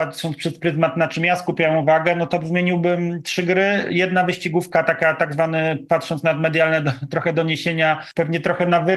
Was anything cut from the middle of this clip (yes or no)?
no